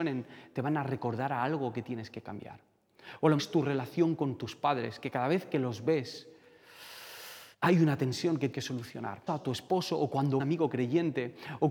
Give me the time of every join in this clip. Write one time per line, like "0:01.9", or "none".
0:03.4
0:07.5
0:08.5
0:09.3
0:10.4